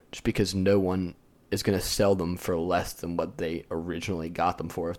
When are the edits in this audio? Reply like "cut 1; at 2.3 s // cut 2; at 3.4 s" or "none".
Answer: none

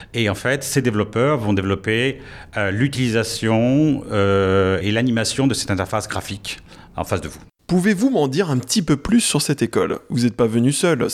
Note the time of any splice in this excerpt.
cut 1; at 4.8 s

